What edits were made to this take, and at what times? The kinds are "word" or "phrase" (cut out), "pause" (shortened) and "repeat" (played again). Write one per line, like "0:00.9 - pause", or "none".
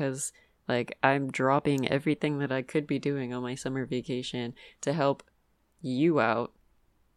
none